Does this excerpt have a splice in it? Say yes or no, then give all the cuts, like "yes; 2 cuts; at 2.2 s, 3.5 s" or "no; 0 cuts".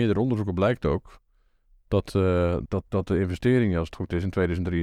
yes; 1 cut; at 2.7 s